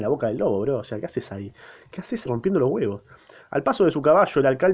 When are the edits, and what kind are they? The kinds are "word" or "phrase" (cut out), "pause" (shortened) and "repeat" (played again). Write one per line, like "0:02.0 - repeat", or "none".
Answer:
0:02.3 - word